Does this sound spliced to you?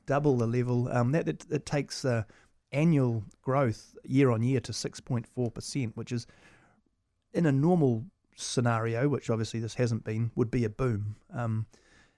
no; 0 cuts

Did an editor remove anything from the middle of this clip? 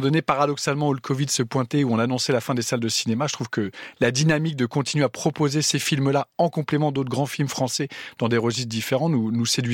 no; 0 cuts

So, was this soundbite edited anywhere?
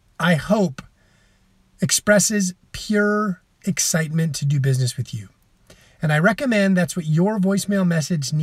no; 0 cuts

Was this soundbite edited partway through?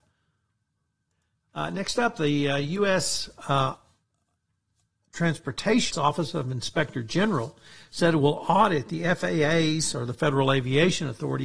yes; 1 cut; at 5.9 s

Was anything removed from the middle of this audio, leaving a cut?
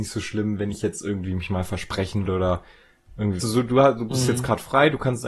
yes; 2 cuts; at 2.3 s, 3.4 s

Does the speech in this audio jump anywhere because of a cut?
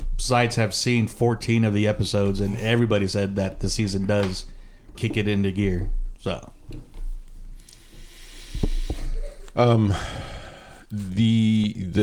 yes; 1 cut; at 4.9 s

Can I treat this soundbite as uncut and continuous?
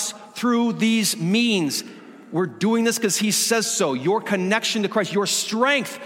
yes; 0 cuts

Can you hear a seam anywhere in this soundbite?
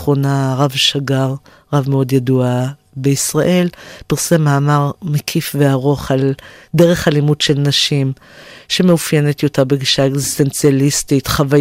no; 0 cuts

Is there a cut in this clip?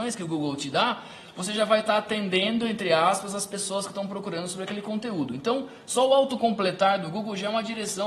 no; 0 cuts

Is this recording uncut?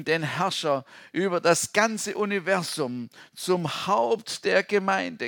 yes; 0 cuts

